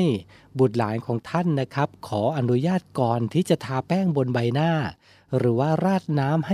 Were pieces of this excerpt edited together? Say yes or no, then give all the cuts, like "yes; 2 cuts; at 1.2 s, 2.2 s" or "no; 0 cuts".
no; 0 cuts